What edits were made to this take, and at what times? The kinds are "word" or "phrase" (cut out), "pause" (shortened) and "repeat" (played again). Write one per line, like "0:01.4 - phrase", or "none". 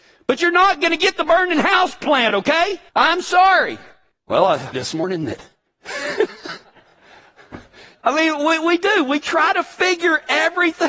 0:02.9 - pause
0:04.7 - phrase
0:08.0 - phrase